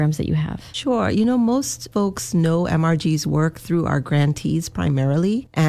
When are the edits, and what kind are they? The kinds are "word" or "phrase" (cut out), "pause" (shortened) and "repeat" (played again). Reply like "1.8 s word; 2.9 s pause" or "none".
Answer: none